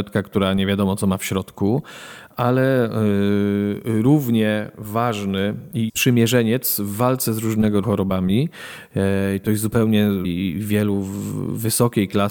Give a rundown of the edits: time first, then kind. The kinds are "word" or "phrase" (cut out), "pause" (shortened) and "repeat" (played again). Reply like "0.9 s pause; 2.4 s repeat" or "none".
5.9 s word; 7.8 s word; 10.2 s word